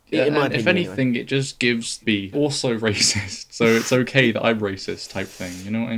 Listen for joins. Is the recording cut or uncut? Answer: cut